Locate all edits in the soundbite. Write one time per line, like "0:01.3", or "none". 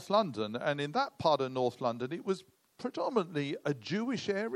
none